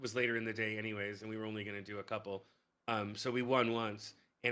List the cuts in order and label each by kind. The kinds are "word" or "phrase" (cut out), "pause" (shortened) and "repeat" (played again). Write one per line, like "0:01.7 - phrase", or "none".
none